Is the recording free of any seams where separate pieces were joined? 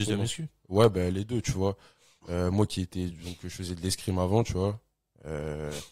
yes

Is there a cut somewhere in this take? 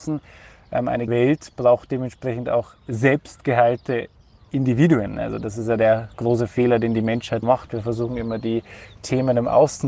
yes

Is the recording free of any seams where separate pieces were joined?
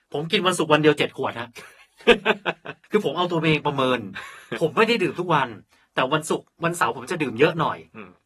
yes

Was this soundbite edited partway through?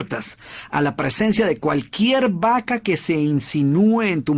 no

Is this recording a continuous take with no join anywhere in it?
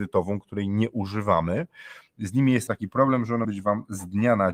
no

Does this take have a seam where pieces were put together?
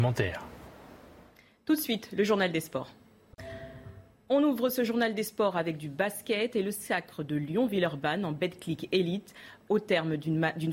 no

